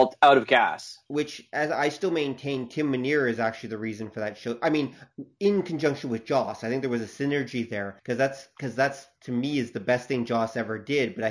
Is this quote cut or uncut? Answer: cut